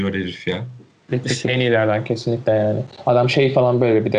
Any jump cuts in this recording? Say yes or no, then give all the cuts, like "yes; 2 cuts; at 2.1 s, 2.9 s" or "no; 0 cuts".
no; 0 cuts